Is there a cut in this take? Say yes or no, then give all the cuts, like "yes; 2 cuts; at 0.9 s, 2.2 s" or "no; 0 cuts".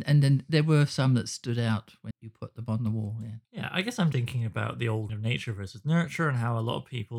yes; 4 cuts; at 2.1 s, 3.4 s, 4.1 s, 5.1 s